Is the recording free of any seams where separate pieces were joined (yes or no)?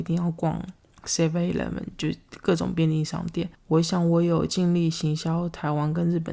no